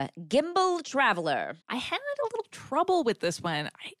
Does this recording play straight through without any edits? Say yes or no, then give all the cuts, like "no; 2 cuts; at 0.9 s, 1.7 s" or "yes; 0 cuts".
no; 1 cut; at 1.6 s